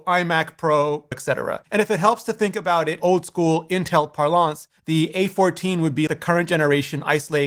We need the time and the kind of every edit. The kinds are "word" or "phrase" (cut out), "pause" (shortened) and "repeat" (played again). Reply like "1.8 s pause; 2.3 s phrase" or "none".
1.1 s word; 3.0 s word; 4.8 s pause; 6.1 s word